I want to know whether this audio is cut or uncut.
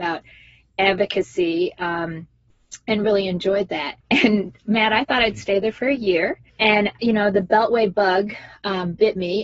cut